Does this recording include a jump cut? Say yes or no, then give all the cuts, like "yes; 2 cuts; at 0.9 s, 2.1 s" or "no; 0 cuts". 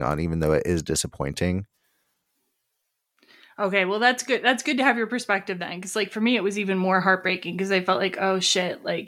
no; 0 cuts